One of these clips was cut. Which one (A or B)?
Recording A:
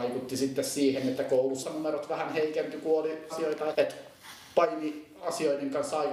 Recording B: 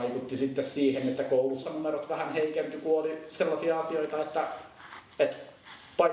A